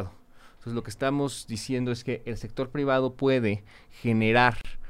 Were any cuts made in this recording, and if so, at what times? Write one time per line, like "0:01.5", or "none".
none